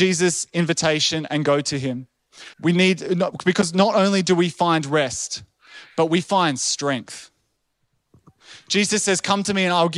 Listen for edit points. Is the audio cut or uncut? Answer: cut